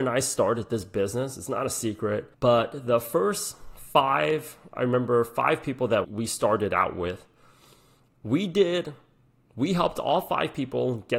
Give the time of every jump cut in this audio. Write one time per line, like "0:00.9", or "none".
0:02.3
0:06.0